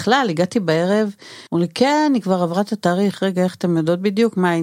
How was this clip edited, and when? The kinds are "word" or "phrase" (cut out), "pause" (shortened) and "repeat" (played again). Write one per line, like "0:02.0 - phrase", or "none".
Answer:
0:01.5 - pause